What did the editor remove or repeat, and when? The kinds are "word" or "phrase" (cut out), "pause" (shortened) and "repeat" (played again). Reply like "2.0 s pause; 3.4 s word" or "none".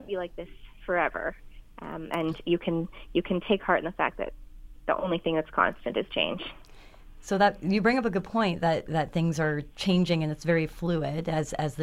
none